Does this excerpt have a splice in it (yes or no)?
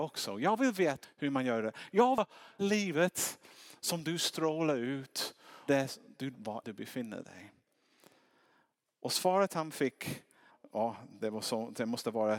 yes